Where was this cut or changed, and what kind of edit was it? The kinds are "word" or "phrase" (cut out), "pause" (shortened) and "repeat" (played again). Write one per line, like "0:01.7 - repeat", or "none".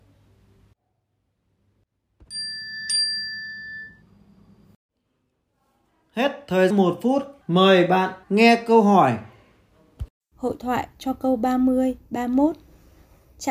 0:06.7 - word
0:07.4 - pause
0:08.2 - pause